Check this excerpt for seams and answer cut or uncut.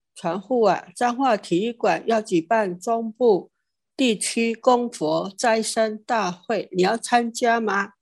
uncut